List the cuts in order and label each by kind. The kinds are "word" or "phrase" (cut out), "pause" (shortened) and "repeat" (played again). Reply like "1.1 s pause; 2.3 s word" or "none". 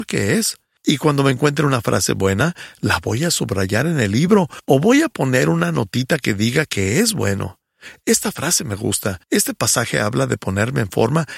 9.2 s pause